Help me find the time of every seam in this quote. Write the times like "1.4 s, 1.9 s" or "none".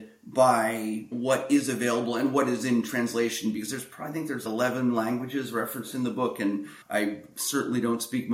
6.8 s